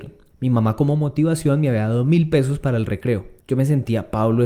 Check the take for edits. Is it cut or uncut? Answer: uncut